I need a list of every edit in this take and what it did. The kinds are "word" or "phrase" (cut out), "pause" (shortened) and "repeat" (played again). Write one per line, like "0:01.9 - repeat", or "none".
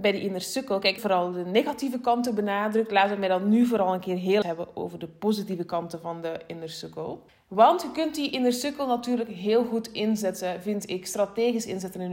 0:01.0 - phrase
0:04.4 - word
0:07.3 - pause